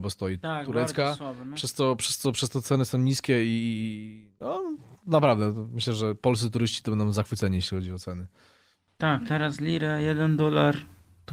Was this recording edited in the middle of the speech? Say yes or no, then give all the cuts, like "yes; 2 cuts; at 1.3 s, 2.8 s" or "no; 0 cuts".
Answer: no; 0 cuts